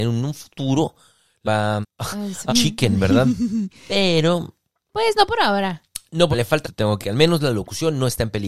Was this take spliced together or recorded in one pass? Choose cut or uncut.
cut